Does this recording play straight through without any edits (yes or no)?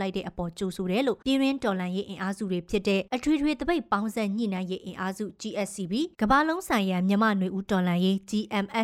no